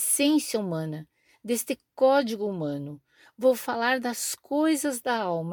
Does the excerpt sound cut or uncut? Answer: uncut